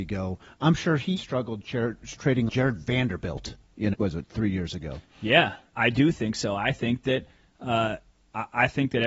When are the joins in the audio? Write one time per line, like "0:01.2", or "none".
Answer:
0:01.2
0:02.5
0:03.9
0:05.7

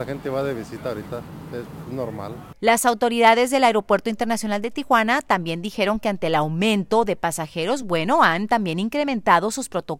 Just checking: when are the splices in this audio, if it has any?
none

